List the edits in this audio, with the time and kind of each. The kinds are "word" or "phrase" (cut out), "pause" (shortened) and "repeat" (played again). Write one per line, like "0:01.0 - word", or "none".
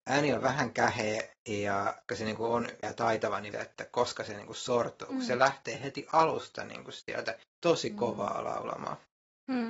0:02.1 - word
0:02.8 - word
0:03.5 - phrase
0:07.5 - pause